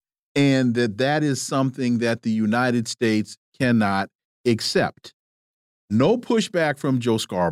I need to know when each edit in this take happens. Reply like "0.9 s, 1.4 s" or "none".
3.4 s